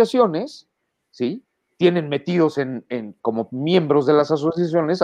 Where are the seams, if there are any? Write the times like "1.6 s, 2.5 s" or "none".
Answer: none